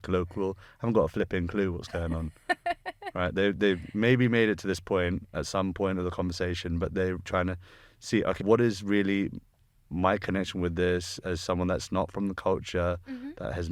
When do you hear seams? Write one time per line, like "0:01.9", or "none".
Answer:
0:07.2
0:08.4